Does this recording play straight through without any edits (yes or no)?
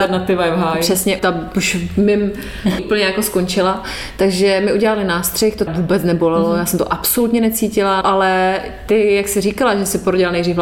no